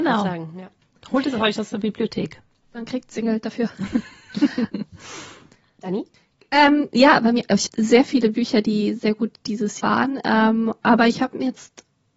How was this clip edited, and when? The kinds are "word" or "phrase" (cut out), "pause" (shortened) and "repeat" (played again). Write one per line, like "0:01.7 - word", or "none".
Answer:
0:03.2 - word
0:07.7 - word
0:09.8 - word

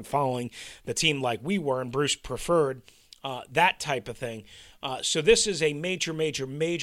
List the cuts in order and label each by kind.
none

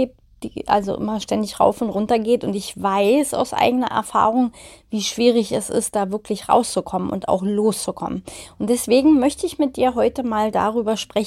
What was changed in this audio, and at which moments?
none

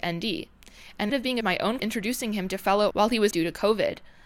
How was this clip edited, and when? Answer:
0:01.1 - word
0:01.4 - phrase
0:01.8 - word
0:02.9 - word
0:03.3 - word

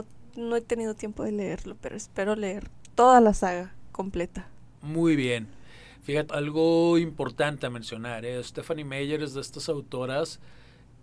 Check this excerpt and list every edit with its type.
0:06.3 - word

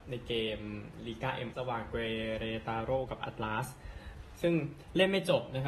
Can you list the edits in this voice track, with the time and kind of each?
0:01.5 - word

